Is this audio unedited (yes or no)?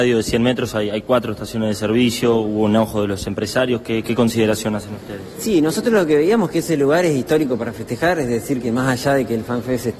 yes